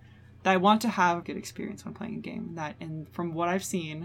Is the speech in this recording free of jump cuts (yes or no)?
no